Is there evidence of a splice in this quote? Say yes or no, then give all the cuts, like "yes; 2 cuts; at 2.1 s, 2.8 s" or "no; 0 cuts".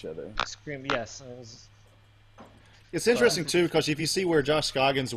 no; 0 cuts